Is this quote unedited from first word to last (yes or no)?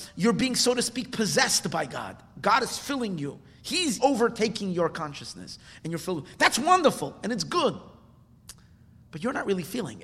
no